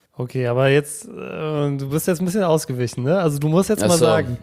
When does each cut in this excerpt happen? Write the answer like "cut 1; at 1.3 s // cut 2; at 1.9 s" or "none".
none